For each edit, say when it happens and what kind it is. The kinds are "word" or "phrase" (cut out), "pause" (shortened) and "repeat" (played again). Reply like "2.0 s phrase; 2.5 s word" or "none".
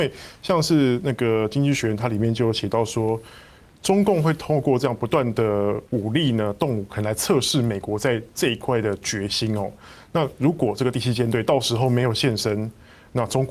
5.9 s pause